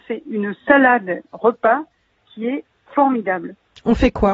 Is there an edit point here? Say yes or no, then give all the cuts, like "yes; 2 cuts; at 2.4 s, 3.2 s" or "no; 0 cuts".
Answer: no; 0 cuts